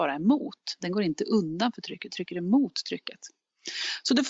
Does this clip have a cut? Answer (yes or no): yes